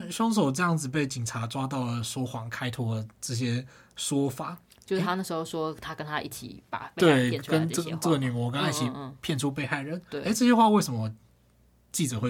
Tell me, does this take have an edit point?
no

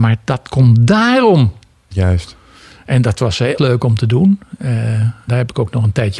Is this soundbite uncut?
no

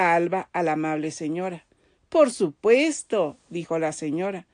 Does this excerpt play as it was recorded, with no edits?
yes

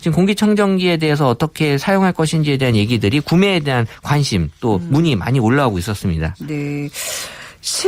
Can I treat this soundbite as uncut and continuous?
yes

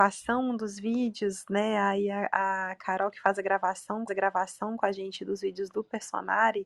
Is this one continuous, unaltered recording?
no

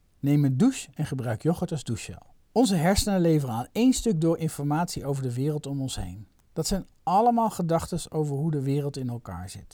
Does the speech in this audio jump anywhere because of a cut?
yes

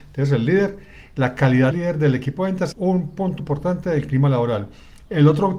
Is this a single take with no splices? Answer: no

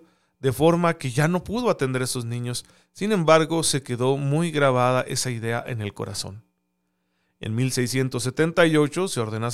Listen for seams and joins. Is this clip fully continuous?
yes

